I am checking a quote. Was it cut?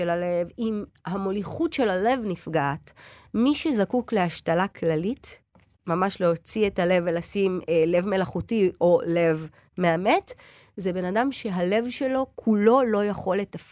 no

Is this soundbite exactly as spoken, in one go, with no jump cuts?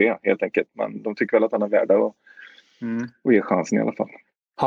yes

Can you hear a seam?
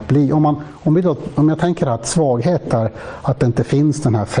no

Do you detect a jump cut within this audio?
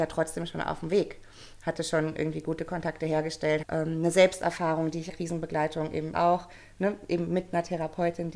yes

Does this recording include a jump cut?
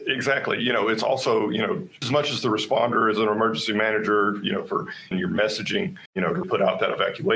yes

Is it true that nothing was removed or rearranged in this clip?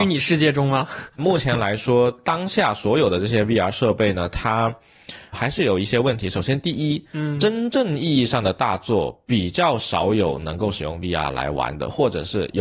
yes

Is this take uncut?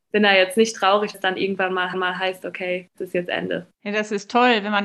no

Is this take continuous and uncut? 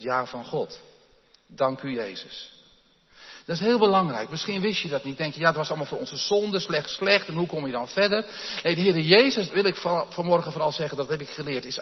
no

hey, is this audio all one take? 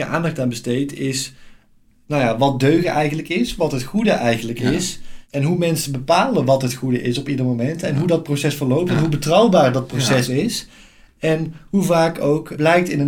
yes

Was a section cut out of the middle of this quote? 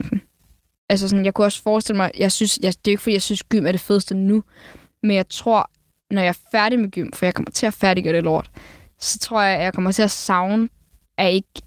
no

